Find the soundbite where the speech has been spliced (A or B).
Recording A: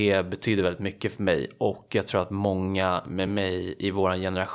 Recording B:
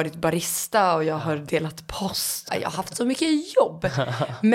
B